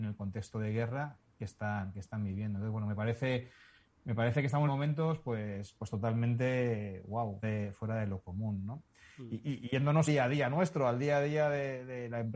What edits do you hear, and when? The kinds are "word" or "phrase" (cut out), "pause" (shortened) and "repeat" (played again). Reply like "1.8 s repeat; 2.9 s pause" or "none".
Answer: 4.7 s word; 7.4 s word; 10.1 s word